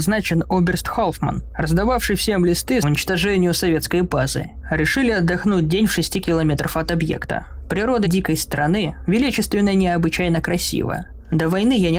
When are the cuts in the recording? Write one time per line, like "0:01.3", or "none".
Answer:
0:02.8
0:08.0